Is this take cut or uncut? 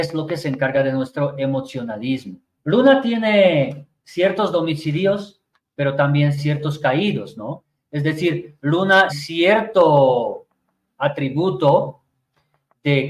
cut